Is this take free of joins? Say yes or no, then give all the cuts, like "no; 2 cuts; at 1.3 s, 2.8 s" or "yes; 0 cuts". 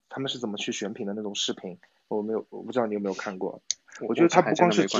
no; 1 cut; at 1.9 s